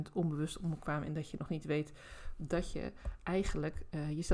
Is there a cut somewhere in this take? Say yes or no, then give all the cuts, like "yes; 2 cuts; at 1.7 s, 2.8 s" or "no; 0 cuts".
no; 0 cuts